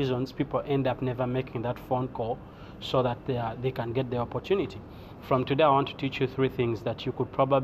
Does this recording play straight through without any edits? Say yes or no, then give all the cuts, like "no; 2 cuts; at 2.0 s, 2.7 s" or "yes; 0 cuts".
yes; 0 cuts